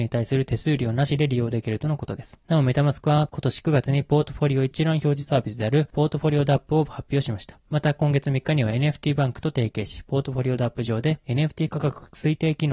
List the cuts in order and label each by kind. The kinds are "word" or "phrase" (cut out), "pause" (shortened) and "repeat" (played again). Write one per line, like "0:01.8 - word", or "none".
none

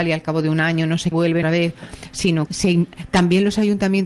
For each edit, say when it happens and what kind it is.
0:01.1 - word
0:01.4 - word
0:02.5 - word

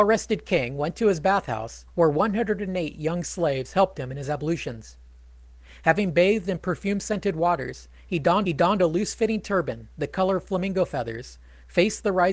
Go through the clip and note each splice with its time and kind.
0:01.9 - pause
0:08.4 - repeat

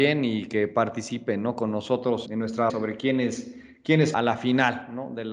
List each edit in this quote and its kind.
0:02.3 - word
0:02.7 - word
0:04.1 - phrase

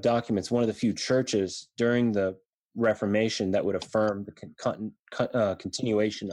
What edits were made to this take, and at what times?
none

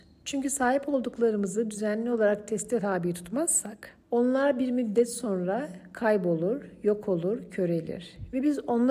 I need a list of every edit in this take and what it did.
0:04.0 - pause

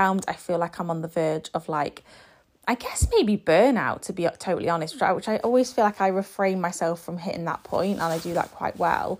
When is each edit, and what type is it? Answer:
none

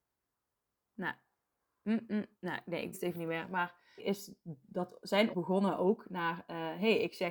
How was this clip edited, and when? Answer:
0:01.3 - pause
0:02.3 - pause
0:02.9 - word
0:04.0 - word
0:05.3 - word

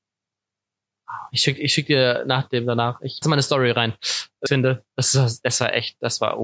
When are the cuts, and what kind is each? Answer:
0:03.2 - phrase
0:04.5 - word

